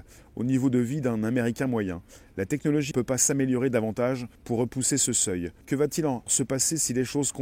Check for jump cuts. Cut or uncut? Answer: cut